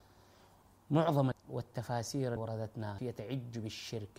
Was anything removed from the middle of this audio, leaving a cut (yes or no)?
yes